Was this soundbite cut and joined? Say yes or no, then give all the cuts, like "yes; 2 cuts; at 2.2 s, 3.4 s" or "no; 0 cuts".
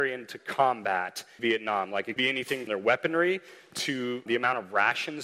yes; 4 cuts; at 1.4 s, 2.2 s, 2.7 s, 4.3 s